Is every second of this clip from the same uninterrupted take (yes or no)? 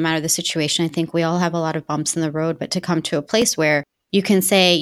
yes